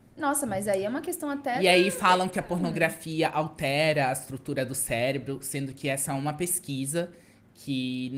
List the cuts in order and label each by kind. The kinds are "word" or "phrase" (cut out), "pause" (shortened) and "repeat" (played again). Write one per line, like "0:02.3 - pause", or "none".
none